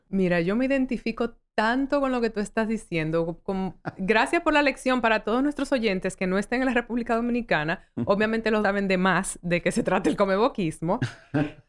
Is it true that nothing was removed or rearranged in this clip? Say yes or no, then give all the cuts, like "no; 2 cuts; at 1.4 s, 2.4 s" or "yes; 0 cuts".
no; 1 cut; at 8.6 s